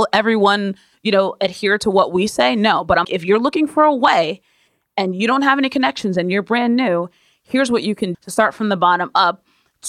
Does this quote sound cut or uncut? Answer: cut